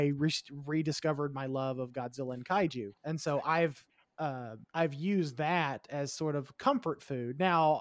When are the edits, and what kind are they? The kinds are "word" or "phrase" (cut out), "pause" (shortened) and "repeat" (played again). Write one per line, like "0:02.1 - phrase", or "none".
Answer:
0:03.0 - pause
0:04.6 - pause